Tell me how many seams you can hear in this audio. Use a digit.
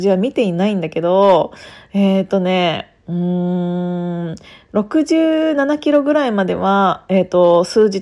0